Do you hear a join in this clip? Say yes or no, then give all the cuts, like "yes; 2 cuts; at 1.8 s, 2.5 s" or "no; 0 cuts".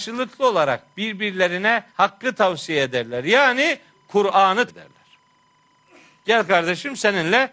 yes; 2 cuts; at 1.9 s, 4.7 s